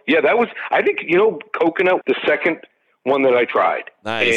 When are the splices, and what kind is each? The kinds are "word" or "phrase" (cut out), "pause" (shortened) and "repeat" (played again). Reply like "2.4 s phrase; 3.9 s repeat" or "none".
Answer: 2.0 s word